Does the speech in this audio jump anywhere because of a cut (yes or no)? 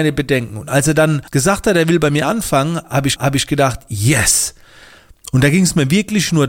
yes